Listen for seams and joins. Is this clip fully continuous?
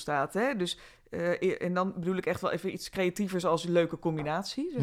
yes; 0 cuts

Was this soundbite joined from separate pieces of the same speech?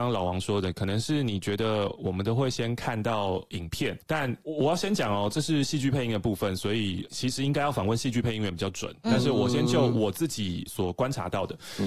yes; 1 cut; at 4.0 s

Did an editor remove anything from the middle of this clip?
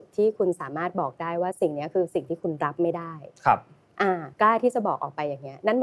yes; 2 cuts; at 3.4 s, 4.3 s

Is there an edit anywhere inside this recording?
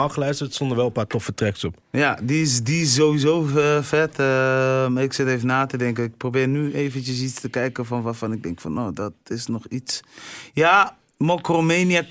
no; 0 cuts

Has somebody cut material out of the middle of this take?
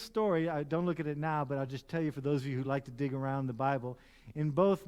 no; 0 cuts

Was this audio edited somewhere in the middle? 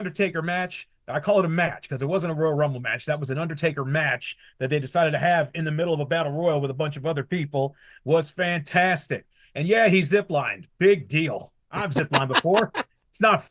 no; 0 cuts

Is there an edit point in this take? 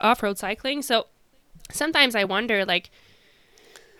no; 0 cuts

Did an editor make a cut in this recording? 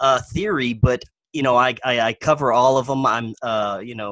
no; 0 cuts

